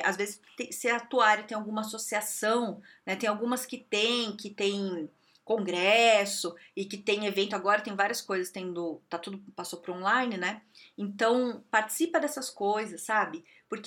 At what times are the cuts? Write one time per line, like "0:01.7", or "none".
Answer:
none